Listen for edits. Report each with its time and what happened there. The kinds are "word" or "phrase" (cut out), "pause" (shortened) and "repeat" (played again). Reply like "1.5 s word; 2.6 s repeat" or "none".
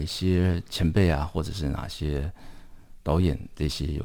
3.0 s pause

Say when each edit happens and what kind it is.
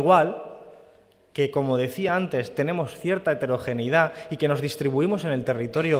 none

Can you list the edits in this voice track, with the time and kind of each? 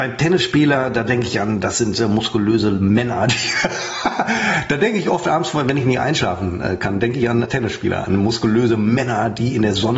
7.4 s word

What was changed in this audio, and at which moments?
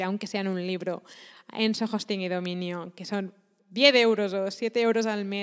none

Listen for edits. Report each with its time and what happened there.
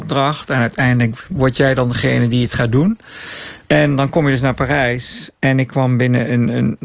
3.6 s pause; 5.4 s pause

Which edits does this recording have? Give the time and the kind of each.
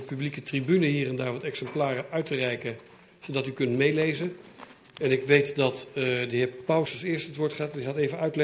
6.9 s word

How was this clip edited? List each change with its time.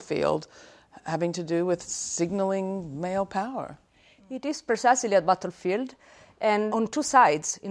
6.7 s word

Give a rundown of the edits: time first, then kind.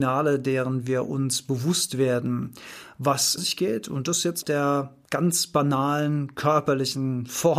3.4 s phrase; 4.4 s phrase; 5.0 s pause

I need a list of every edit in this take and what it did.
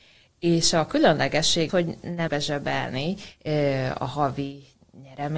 1.7 s word; 2.3 s word

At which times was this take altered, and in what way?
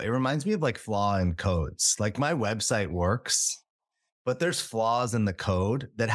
none

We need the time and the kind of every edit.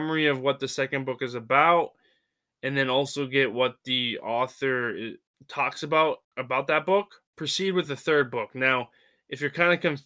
none

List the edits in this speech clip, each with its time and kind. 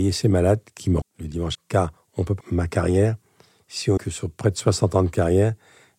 1.0 s word; 1.5 s word; 2.4 s word; 4.0 s word

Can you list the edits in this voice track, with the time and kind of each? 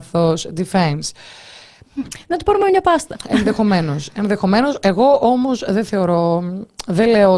none

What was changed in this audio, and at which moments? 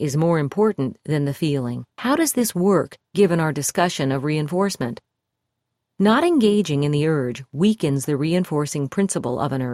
1.9 s pause

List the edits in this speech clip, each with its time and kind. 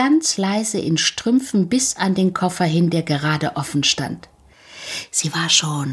none

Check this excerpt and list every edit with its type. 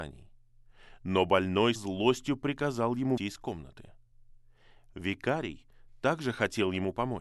1.8 s word; 3.2 s word

